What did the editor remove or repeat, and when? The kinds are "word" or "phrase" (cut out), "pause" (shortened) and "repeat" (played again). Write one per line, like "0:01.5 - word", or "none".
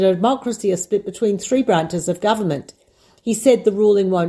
none